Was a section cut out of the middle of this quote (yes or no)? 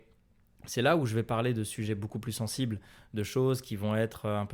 no